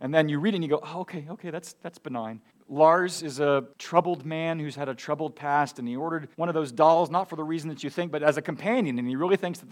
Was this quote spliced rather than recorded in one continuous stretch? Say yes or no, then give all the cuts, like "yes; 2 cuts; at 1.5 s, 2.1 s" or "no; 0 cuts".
yes; 3 cuts; at 2.5 s, 3.7 s, 6.3 s